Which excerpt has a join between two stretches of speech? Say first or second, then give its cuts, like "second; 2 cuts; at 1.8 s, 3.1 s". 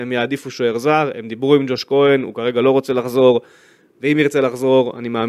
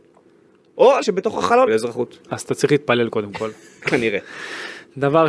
second; 3 cuts; at 1.0 s, 1.7 s, 2.2 s